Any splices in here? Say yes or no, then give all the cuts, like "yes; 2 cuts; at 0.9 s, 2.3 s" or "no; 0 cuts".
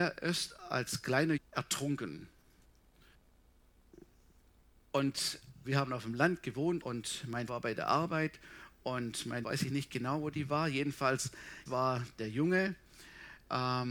yes; 6 cuts; at 1.4 s, 5.6 s, 6.8 s, 7.5 s, 9.4 s, 11.7 s